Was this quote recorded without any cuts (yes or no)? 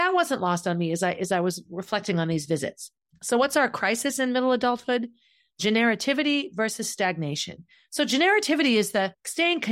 yes